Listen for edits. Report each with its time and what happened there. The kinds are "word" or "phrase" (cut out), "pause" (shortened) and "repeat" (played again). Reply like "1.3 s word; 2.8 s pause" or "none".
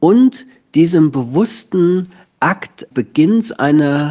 2.9 s word

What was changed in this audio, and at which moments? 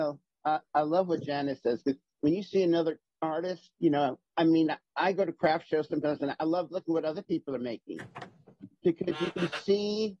none

